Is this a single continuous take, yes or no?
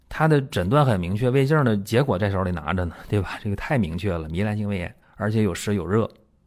no